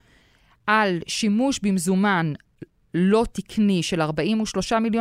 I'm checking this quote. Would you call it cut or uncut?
uncut